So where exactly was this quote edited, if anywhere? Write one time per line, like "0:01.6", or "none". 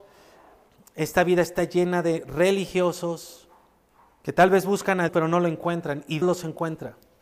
0:03.9
0:05.1
0:06.2